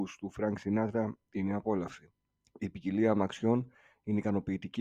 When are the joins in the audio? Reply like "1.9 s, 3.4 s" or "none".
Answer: 2.3 s